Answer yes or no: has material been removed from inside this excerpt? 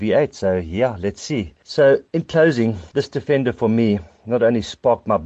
no